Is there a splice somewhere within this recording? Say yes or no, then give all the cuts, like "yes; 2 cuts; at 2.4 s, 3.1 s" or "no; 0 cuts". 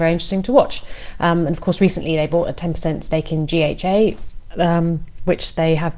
no; 0 cuts